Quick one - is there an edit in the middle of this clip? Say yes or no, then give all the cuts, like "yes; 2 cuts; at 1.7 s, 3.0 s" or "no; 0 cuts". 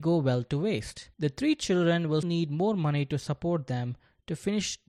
yes; 2 cuts; at 1.1 s, 2.2 s